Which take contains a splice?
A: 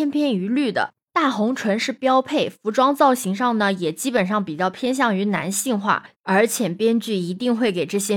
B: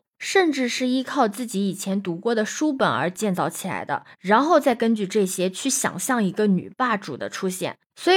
A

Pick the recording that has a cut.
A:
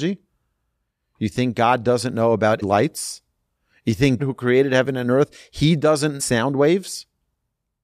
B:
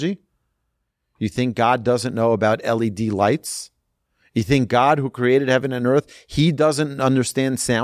A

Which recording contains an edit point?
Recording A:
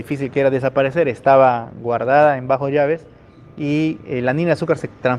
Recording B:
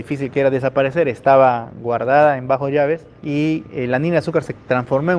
B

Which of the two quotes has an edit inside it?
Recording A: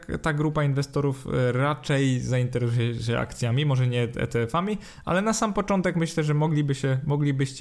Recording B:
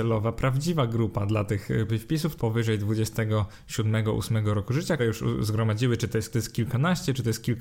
B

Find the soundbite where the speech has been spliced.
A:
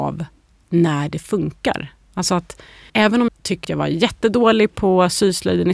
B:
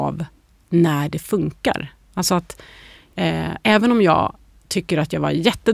A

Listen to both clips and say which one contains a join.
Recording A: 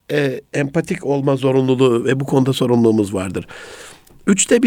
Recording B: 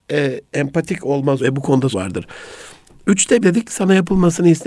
B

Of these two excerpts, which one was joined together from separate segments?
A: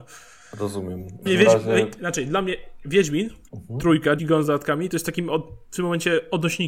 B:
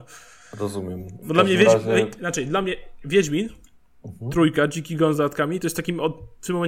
A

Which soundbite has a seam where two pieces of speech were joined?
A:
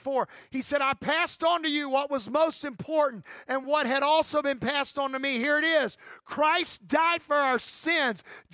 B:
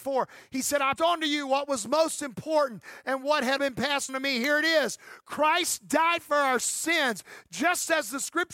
B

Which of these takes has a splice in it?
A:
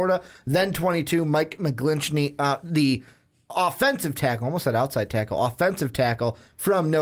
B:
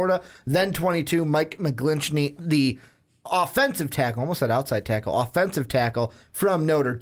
B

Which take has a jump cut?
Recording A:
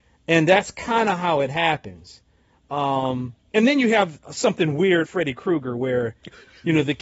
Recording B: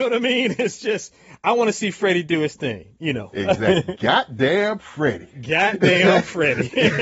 A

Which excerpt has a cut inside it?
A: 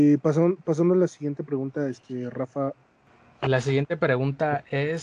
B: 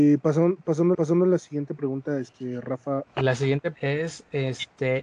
B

